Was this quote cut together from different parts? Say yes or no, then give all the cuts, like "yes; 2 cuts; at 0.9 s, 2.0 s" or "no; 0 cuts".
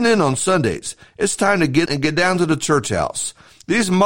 yes; 1 cut; at 1.9 s